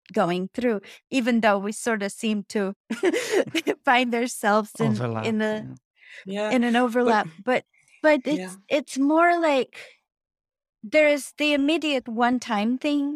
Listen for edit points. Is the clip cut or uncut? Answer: uncut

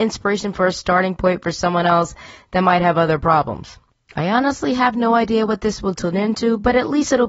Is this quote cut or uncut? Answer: uncut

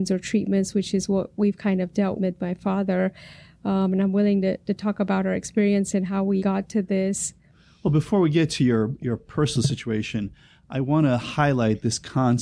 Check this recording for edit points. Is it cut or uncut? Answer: cut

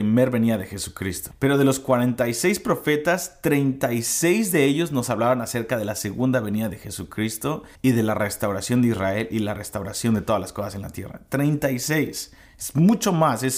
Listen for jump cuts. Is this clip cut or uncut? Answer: cut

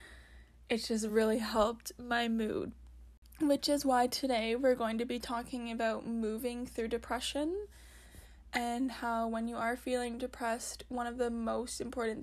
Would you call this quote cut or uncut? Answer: uncut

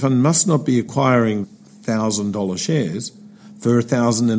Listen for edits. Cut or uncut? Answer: cut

